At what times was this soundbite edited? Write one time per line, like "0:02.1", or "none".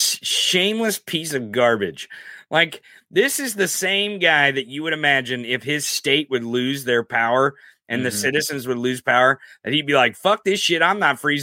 none